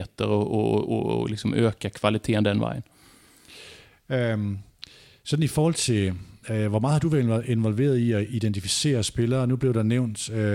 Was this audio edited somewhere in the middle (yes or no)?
no